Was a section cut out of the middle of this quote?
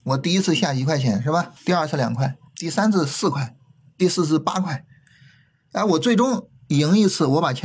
yes; 2 cuts; at 1.6 s, 2.5 s

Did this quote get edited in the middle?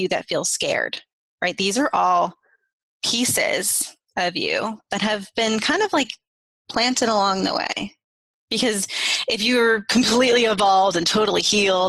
no; 0 cuts

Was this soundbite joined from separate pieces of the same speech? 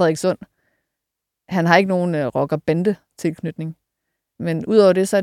no; 0 cuts

